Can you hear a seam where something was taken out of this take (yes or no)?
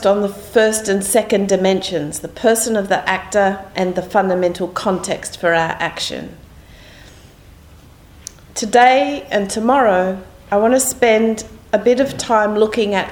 no